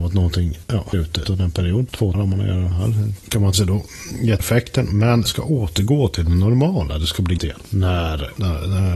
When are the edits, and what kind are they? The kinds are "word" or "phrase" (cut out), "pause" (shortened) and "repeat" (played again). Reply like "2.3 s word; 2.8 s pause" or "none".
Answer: 0.9 s word; 1.2 s word; 2.1 s word; 2.7 s word; 3.5 s word; 4.4 s word; 5.3 s word; 7.4 s word